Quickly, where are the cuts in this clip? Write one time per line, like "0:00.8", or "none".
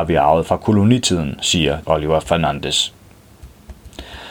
0:01.8